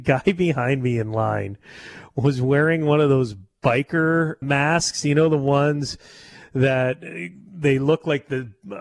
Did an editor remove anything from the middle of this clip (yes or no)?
yes